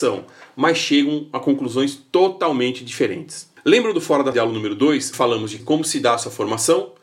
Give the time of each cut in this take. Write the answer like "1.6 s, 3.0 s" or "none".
4.3 s, 5.1 s, 5.6 s